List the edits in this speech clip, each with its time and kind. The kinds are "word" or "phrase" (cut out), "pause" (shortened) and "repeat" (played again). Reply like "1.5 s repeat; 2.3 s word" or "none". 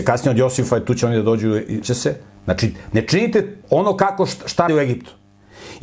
1.8 s word; 3.6 s pause; 4.7 s word